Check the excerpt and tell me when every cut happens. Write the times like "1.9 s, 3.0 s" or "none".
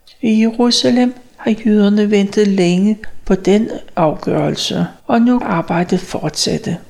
5.0 s, 5.4 s